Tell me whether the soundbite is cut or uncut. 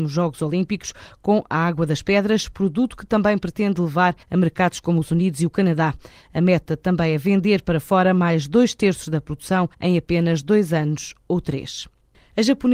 cut